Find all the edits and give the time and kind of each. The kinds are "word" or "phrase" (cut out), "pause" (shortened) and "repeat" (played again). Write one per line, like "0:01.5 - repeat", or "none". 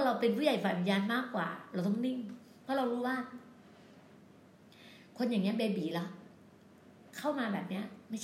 none